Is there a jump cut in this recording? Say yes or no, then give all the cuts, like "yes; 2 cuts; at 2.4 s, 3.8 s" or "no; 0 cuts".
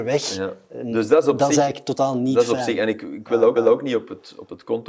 yes; 1 cut; at 3.6 s